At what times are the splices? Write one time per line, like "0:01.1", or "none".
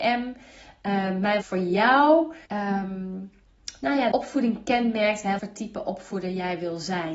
0:01.4
0:02.4
0:04.1
0:05.4